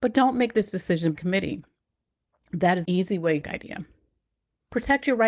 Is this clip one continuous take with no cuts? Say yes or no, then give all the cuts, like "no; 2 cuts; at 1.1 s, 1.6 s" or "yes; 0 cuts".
no; 3 cuts; at 1.1 s, 2.8 s, 3.4 s